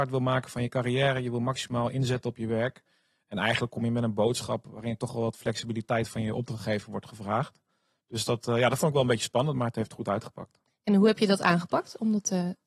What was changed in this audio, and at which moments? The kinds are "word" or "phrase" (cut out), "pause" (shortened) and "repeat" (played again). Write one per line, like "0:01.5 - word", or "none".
none